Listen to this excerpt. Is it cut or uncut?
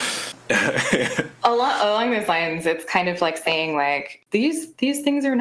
uncut